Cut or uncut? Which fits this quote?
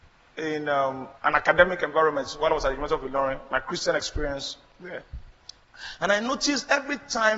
cut